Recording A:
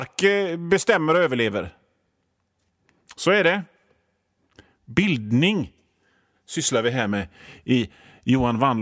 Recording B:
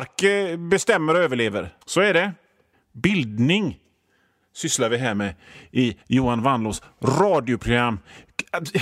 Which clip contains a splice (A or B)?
B